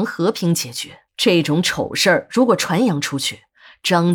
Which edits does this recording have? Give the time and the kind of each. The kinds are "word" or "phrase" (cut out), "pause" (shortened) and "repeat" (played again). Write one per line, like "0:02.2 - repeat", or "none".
0:01.1 - pause